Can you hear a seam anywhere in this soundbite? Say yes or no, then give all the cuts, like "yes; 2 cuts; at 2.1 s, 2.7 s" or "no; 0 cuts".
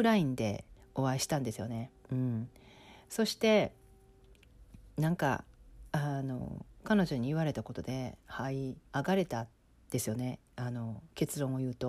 yes; 4 cuts; at 2.0 s, 8.9 s, 9.5 s, 10.5 s